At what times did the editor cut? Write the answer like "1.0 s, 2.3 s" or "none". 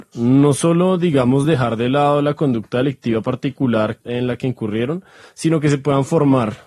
none